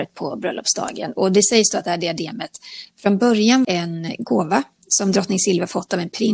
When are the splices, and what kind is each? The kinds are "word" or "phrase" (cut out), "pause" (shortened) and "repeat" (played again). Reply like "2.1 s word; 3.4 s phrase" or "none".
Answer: 3.6 s word